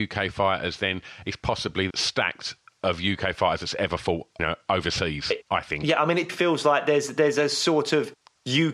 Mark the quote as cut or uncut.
cut